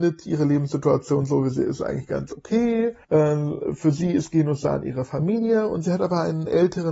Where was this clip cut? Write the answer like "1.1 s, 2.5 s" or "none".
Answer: 3.0 s